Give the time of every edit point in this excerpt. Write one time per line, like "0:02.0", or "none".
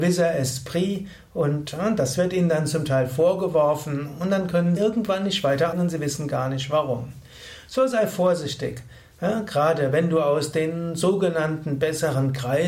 0:04.8
0:05.7